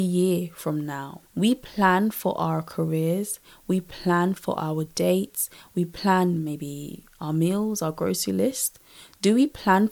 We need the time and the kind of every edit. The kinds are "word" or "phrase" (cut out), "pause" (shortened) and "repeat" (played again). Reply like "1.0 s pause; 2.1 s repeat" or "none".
1.3 s pause